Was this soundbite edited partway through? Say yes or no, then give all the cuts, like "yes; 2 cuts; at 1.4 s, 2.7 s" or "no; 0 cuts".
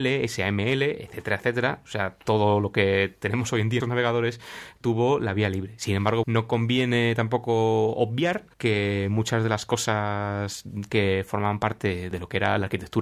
yes; 3 cuts; at 3.8 s, 6.2 s, 8.5 s